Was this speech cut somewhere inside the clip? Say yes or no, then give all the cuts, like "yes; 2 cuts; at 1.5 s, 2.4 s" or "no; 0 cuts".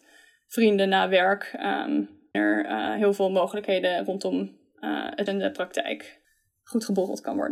yes; 2 cuts; at 2.3 s, 5.3 s